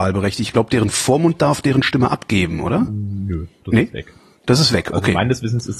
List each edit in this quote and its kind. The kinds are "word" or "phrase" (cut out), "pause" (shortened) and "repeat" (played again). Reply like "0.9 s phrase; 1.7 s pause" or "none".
none